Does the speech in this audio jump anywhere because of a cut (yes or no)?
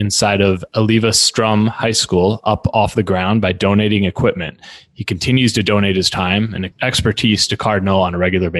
no